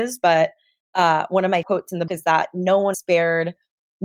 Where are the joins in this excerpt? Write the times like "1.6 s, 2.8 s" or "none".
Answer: 1.6 s, 2.1 s, 2.9 s